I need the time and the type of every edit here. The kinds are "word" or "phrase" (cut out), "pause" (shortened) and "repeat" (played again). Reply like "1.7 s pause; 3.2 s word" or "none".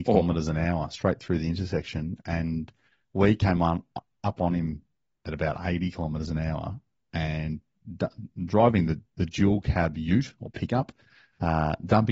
none